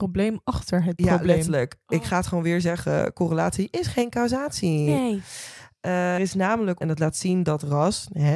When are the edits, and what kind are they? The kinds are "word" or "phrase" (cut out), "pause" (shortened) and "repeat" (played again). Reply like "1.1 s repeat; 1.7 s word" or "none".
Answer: 6.2 s word; 6.8 s phrase